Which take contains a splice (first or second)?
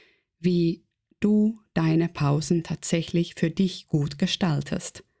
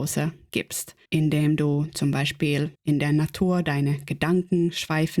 second